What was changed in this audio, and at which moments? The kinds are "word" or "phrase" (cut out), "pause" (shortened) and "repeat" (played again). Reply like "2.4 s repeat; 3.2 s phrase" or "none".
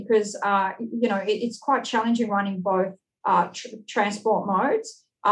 none